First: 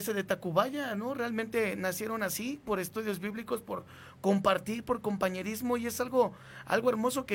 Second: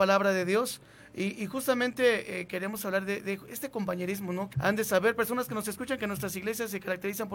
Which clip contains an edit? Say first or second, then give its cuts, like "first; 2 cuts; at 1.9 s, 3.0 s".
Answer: second; 1 cut; at 4.5 s